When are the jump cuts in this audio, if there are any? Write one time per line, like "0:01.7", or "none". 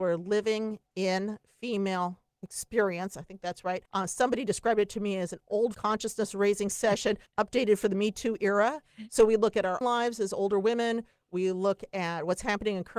0:03.9
0:05.7
0:07.3
0:09.8